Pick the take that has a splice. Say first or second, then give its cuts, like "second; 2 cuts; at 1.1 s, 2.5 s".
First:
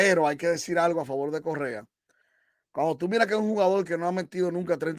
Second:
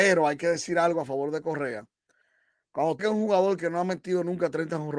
second; 1 cut; at 3.0 s